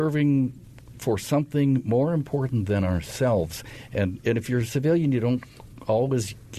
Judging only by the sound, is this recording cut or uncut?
uncut